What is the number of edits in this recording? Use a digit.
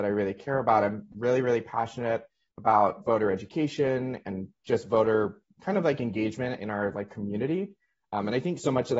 0